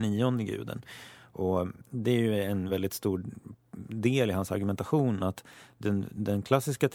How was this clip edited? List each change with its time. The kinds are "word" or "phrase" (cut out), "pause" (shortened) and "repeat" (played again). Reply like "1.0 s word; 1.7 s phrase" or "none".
none

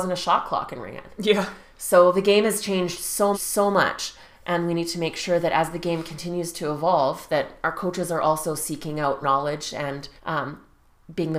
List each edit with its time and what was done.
3.3 s repeat; 9.2 s word; 10.2 s pause

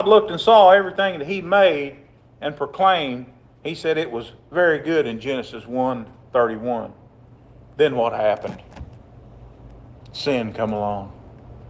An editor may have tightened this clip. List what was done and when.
none

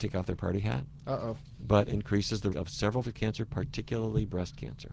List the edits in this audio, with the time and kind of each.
1.9 s word; 2.5 s word; 3.0 s word

